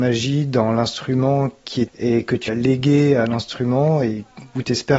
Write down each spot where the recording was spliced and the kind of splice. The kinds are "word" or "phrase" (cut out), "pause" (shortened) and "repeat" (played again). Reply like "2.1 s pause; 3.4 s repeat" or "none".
1.9 s phrase; 2.5 s word